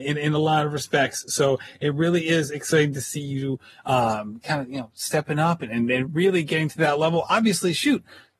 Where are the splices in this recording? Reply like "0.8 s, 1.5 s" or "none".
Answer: none